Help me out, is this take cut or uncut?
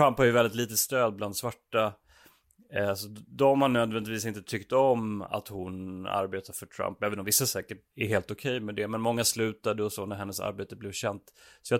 cut